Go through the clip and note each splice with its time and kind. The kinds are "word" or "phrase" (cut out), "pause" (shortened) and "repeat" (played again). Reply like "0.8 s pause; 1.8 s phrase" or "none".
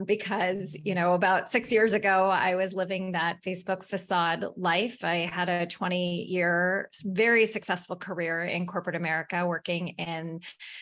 none